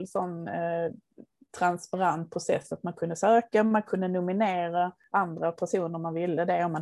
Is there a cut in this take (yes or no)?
no